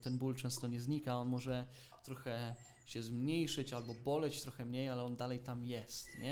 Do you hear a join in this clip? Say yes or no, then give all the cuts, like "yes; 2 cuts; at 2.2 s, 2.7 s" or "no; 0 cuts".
no; 0 cuts